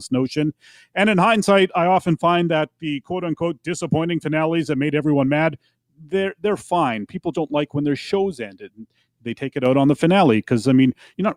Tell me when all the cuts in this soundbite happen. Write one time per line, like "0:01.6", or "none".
0:07.3